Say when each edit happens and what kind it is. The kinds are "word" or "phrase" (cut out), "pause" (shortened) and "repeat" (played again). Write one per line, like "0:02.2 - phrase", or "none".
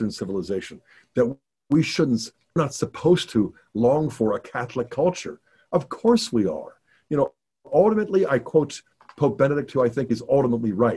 0:02.6 - phrase